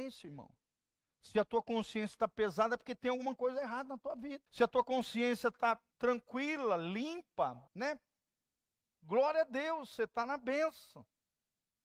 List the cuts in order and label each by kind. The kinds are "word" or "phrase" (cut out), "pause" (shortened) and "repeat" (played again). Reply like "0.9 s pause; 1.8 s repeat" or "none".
4.5 s pause; 5.9 s pause; 7.7 s pause